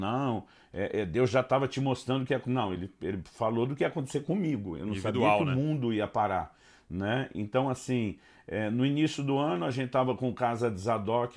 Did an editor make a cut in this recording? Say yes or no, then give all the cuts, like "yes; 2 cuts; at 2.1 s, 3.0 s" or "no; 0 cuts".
no; 0 cuts